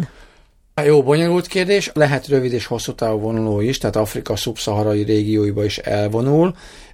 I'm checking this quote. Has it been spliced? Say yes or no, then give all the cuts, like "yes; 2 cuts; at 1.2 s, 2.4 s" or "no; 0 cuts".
no; 0 cuts